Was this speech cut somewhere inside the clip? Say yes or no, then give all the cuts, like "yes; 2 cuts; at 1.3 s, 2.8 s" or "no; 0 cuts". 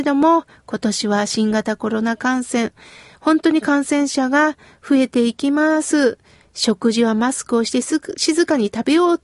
no; 0 cuts